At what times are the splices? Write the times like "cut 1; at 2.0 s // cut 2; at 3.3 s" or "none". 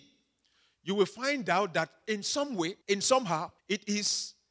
cut 1; at 2.8 s // cut 2; at 3.6 s

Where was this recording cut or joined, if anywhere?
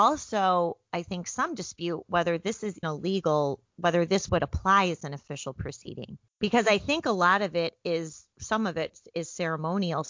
cut 1; at 2.8 s // cut 2; at 3.7 s // cut 3; at 6.3 s // cut 4; at 8.3 s

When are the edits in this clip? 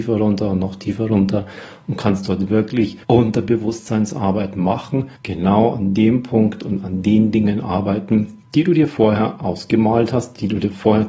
cut 1; at 3.0 s // cut 2; at 5.2 s // cut 3; at 8.4 s

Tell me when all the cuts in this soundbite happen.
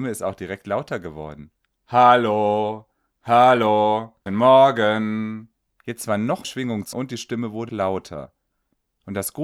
cut 1; at 1.7 s // cut 2; at 4.3 s // cut 3; at 5.7 s // cut 4; at 6.4 s // cut 5; at 6.9 s // cut 6; at 7.7 s

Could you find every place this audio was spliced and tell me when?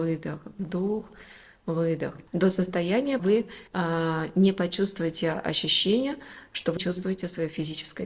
cut 1; at 2.3 s // cut 2; at 3.2 s // cut 3; at 3.7 s // cut 4; at 6.8 s

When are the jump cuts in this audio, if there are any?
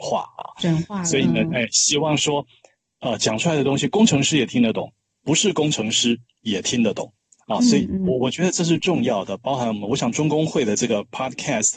none

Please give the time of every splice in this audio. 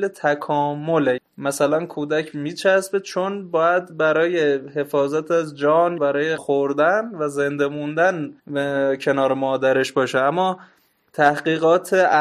cut 1; at 1.2 s // cut 2; at 2.3 s // cut 3; at 6.0 s // cut 4; at 6.4 s // cut 5; at 8.4 s

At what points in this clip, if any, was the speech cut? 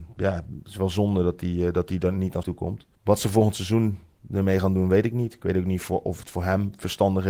cut 1; at 2.4 s // cut 2; at 2.9 s

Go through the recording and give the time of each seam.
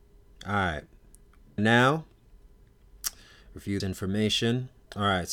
cut 1; at 1.6 s // cut 2; at 3.8 s

